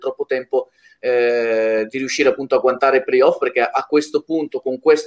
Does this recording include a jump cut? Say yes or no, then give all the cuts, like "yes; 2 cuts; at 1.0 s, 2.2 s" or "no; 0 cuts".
no; 0 cuts